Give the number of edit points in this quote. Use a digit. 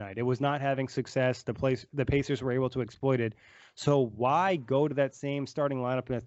0